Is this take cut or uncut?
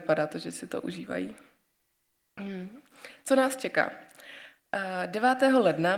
uncut